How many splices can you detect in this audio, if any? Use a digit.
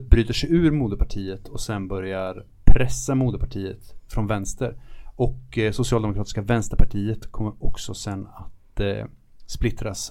0